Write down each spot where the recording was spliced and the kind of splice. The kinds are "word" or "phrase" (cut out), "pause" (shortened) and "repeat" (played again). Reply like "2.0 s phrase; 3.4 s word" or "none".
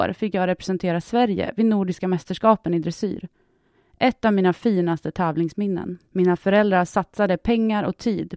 6.1 s pause